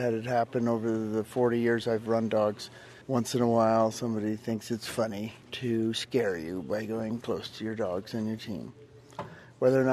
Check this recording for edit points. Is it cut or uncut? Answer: cut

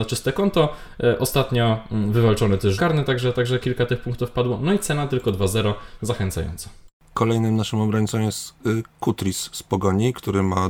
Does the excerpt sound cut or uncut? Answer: cut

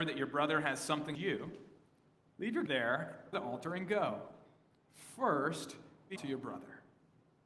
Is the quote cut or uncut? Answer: cut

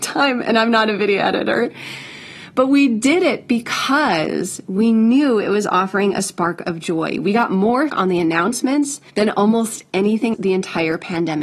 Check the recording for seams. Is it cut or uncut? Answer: cut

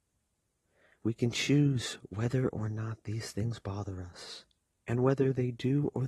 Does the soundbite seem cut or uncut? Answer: uncut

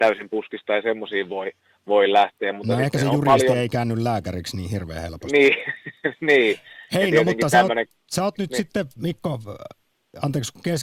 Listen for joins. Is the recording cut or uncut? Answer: uncut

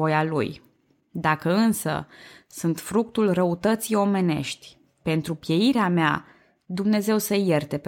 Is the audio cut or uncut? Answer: uncut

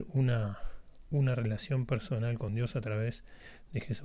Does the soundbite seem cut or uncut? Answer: uncut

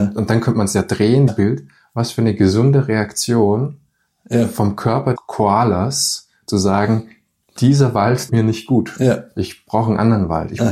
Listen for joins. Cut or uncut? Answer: cut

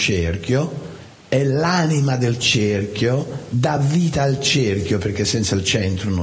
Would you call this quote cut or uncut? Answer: uncut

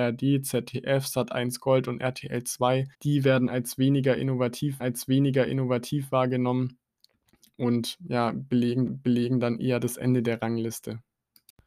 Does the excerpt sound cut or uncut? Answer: cut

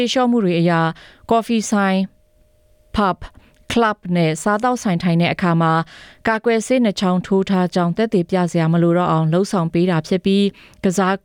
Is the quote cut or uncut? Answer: uncut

